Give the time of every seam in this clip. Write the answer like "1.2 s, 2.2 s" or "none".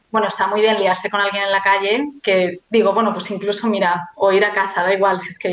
2.6 s